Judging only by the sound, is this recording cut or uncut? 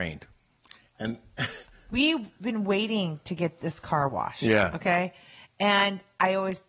uncut